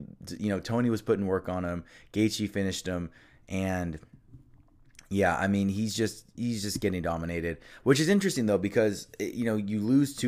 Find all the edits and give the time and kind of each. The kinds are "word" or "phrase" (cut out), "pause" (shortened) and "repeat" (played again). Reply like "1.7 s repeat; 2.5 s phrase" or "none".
none